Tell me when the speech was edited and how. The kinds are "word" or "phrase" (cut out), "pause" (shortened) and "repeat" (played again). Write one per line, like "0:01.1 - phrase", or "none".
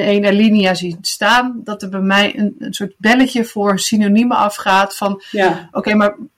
none

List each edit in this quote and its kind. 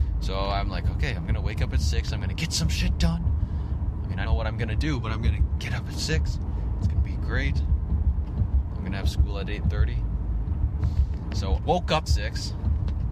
0:04.2 - word
0:11.6 - word
0:12.1 - word

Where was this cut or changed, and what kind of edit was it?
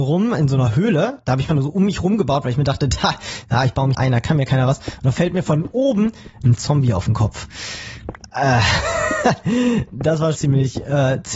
0:01.5 - word
0:03.9 - word
0:05.1 - word
0:06.6 - word
0:10.3 - word

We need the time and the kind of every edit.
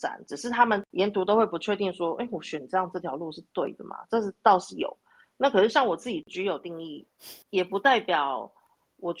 0:07.4 - pause

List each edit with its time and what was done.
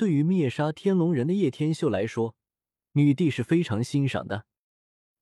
none

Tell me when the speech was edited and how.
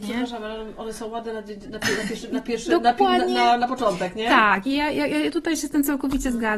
none

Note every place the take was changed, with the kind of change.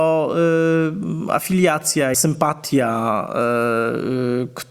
0:02.1 - phrase

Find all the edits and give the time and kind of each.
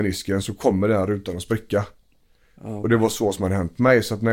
none

